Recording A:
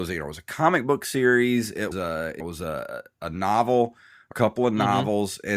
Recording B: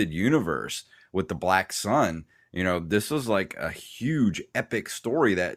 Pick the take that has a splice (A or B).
A